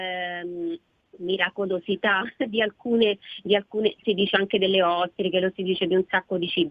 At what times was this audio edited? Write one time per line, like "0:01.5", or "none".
0:00.9
0:04.0